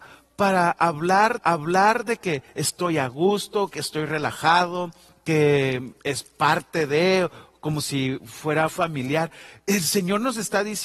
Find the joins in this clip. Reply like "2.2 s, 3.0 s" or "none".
1.4 s, 6.0 s, 8.7 s